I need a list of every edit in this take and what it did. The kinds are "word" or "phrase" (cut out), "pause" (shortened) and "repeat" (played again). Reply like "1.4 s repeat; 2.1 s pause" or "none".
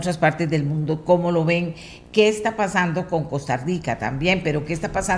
none